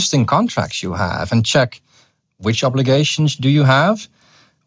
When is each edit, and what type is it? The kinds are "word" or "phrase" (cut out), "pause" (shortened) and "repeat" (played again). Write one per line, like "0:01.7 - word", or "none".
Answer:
none